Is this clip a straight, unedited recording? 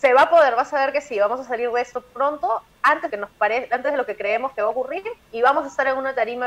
no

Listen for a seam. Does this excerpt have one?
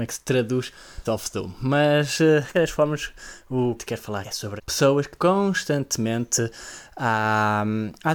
yes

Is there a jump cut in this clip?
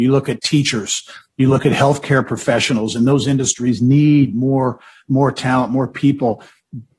no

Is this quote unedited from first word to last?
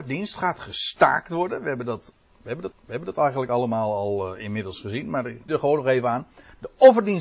no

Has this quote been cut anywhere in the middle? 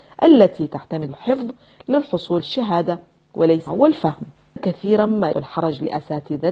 yes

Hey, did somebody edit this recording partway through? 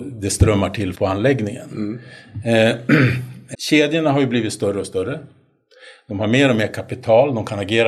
yes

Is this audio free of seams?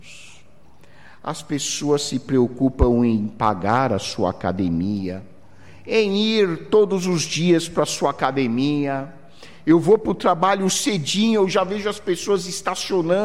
yes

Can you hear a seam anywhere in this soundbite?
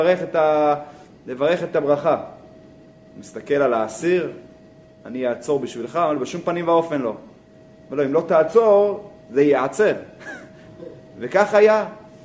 no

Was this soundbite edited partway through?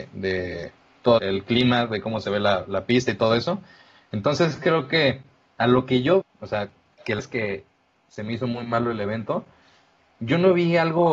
yes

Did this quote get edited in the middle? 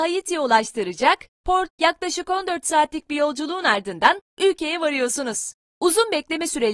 yes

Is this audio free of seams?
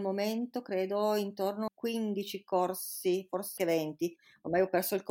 no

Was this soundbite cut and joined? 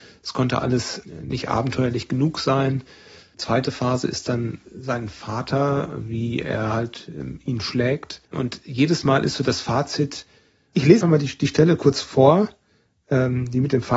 yes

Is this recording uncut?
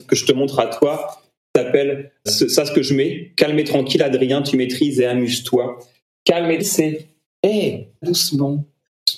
no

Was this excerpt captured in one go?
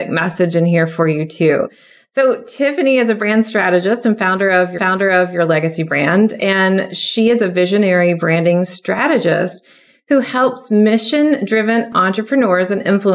no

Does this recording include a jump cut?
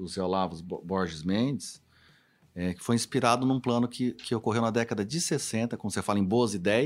no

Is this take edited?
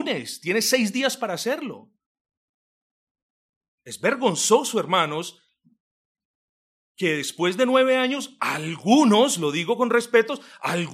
no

